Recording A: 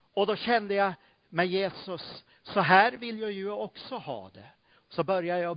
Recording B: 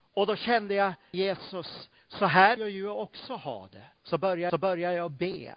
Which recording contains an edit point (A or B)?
B